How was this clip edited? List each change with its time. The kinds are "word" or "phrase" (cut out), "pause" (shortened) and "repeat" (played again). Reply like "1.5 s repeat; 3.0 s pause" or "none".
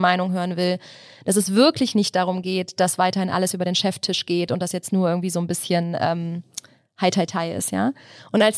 none